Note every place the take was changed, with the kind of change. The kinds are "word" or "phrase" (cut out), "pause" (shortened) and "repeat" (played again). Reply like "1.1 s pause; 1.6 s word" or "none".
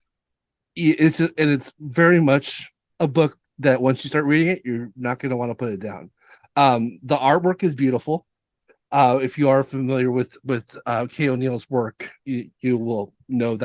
2.9 s pause